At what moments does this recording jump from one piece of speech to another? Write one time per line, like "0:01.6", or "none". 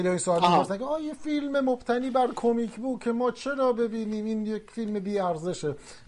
none